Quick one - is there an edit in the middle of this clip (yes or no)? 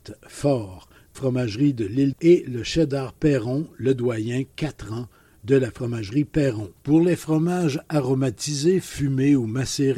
yes